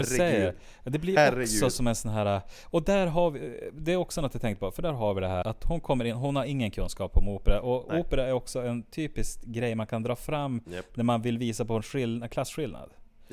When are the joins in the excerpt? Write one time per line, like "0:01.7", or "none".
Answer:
0:05.4